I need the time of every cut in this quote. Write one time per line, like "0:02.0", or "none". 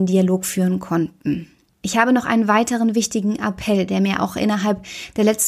0:01.7